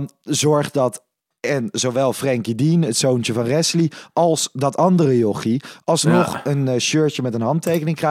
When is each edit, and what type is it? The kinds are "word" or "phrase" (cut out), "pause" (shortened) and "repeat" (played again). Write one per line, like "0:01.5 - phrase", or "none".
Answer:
none